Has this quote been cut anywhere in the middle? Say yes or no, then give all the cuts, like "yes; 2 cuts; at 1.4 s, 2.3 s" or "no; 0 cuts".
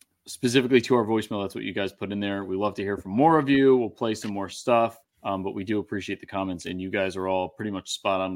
yes; 1 cut; at 5.0 s